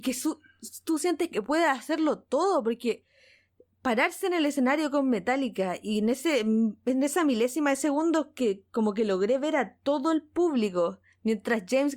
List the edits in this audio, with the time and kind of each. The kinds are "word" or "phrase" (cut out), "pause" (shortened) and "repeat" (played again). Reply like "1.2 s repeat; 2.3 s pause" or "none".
none